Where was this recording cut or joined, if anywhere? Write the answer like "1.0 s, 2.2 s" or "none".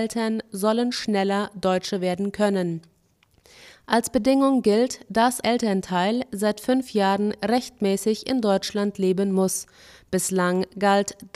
5.4 s